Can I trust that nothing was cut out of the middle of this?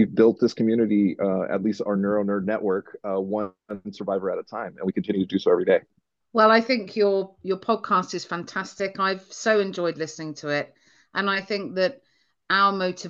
yes; 0 cuts

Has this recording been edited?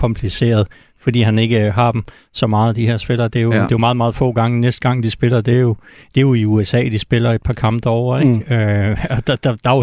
no; 0 cuts

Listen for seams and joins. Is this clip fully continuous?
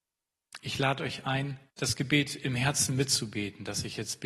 no; 1 cut; at 1.7 s

